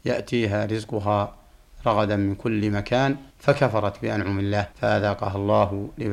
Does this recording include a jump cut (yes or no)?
yes